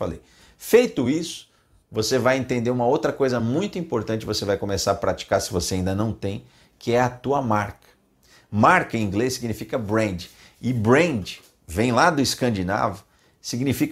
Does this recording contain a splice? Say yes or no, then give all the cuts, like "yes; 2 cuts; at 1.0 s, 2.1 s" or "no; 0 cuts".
no; 0 cuts